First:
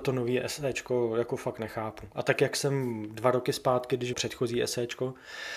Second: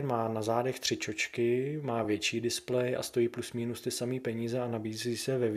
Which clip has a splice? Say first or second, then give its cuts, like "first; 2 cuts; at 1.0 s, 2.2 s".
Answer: first; 1 cut; at 4.1 s